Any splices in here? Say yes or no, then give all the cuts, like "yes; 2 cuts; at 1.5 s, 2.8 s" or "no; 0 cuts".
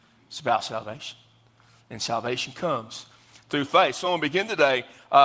no; 0 cuts